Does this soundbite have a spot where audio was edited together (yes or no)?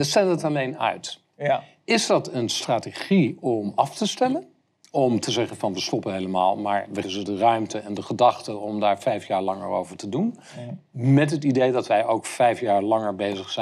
yes